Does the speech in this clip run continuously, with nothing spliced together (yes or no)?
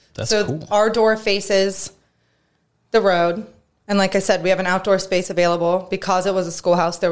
yes